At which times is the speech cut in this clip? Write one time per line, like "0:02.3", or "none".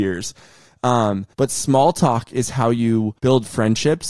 0:01.3
0:03.2